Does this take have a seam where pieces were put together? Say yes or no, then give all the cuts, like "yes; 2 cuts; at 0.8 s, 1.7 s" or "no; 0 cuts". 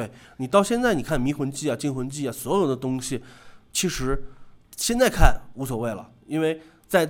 yes; 1 cut; at 4.6 s